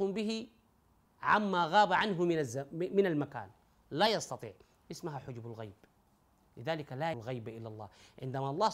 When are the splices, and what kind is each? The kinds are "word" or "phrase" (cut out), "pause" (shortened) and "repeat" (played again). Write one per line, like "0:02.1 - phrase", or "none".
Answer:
0:07.1 - word